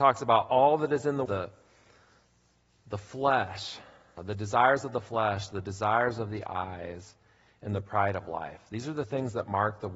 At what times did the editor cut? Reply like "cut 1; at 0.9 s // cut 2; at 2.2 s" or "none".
cut 1; at 1.3 s // cut 2; at 4.2 s